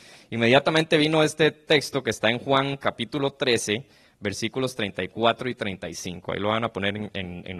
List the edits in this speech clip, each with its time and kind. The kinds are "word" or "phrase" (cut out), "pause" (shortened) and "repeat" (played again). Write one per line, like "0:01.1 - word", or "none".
none